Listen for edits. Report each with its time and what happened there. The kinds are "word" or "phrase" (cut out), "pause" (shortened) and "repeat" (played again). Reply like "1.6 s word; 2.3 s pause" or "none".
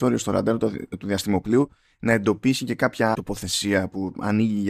3.1 s word